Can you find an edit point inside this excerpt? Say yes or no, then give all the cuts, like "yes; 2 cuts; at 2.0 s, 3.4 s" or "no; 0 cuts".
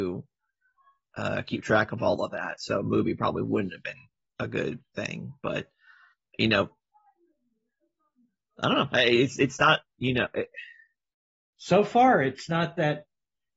no; 0 cuts